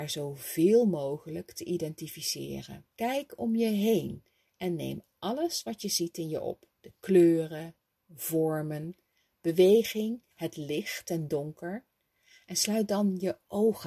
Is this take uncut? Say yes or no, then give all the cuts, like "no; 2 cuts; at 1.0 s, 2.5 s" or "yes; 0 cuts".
no; 3 cuts; at 2.9 s, 6.7 s, 10.3 s